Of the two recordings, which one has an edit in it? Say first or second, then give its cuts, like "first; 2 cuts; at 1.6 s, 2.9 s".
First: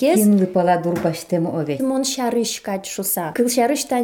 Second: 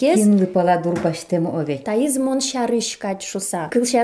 first; 1 cut; at 1.8 s